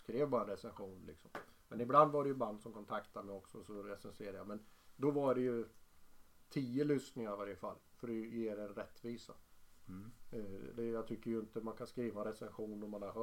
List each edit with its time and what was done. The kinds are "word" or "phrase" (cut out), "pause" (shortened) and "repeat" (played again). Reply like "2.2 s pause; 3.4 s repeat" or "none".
none